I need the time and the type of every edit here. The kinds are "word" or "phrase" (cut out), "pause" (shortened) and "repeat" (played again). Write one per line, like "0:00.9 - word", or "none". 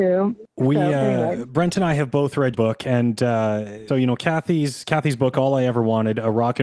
0:02.5 - word
0:03.9 - word